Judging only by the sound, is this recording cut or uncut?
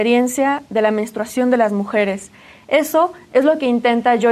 uncut